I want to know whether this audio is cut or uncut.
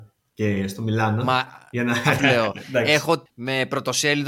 cut